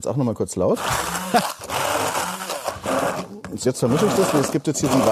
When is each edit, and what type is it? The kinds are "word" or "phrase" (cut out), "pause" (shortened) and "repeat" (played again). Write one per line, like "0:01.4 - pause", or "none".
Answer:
0:03.6 - word